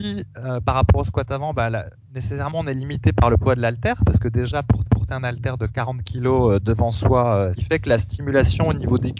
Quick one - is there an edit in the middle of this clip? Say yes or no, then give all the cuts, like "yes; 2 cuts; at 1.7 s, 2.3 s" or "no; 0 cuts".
yes; 2 cuts; at 4.9 s, 7.5 s